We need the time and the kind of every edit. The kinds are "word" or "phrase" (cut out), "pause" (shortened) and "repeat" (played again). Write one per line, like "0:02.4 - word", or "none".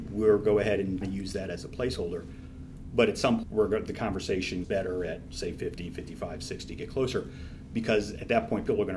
0:01.0 - word
0:03.4 - word
0:04.6 - word